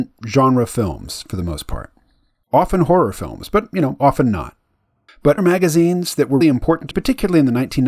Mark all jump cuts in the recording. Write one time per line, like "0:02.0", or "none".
0:05.4
0:06.4
0:06.9